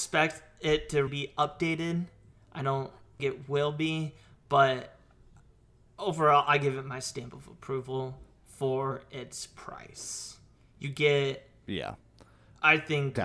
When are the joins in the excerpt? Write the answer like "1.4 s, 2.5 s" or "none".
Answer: 1.1 s, 3.2 s